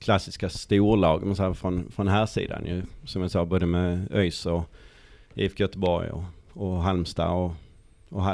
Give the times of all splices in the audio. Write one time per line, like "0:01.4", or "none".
none